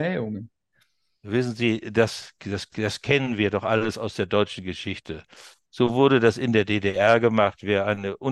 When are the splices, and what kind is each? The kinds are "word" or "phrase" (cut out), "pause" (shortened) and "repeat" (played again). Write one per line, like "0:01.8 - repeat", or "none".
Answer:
none